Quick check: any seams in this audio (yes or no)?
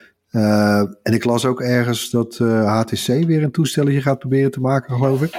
no